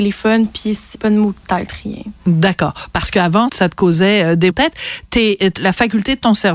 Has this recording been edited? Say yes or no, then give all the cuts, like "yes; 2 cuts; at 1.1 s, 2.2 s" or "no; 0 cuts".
yes; 4 cuts; at 0.9 s, 3.5 s, 4.5 s, 5.6 s